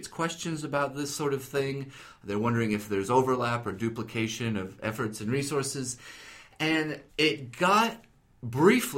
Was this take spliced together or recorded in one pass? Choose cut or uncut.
cut